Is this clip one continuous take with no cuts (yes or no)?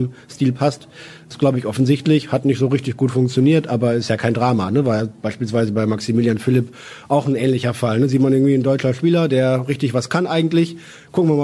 yes